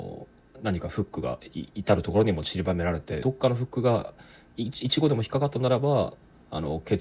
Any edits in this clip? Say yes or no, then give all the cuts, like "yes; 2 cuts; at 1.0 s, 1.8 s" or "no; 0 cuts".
yes; 1 cut; at 3.2 s